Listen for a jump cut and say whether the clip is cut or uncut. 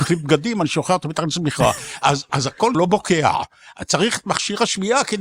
cut